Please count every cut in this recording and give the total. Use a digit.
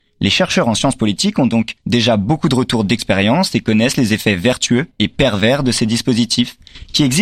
2